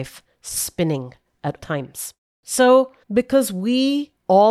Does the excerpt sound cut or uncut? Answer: cut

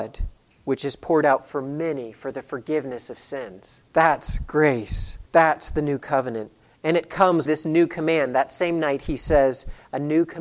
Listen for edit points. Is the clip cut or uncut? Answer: cut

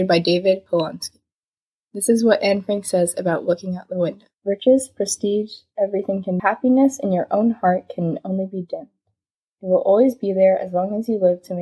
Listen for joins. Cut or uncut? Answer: cut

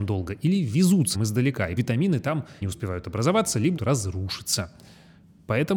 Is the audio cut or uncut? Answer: cut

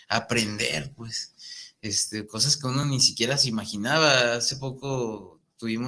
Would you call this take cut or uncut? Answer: uncut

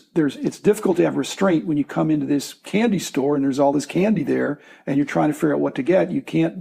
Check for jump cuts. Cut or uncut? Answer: uncut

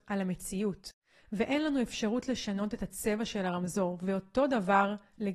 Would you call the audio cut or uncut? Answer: uncut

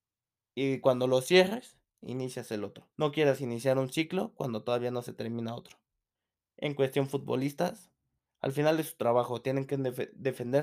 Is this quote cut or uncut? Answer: cut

